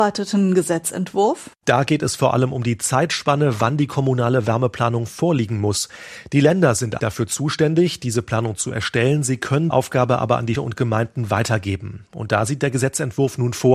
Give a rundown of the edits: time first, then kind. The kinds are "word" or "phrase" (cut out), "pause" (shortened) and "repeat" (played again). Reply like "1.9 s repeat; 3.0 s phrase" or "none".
7.0 s word; 9.7 s word; 10.6 s word